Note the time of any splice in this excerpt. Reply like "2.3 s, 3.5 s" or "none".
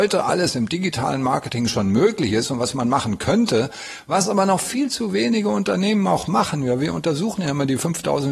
none